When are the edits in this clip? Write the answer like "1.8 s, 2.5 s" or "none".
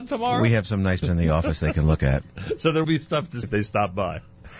1.0 s, 2.8 s, 3.4 s